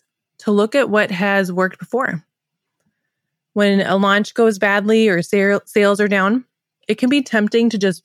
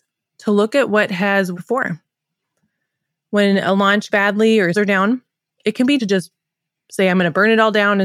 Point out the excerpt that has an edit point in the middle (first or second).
second